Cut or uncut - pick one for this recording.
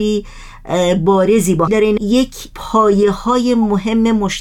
cut